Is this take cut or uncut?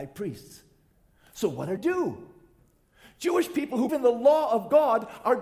cut